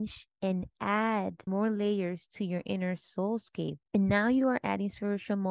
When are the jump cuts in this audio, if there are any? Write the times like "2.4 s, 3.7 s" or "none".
1.5 s, 3.9 s